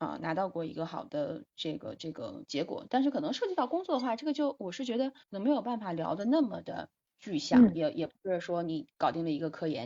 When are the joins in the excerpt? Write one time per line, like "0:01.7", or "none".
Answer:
0:05.2
0:07.0